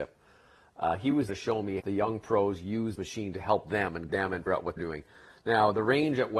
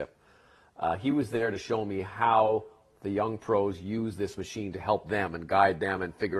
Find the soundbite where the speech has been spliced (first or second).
first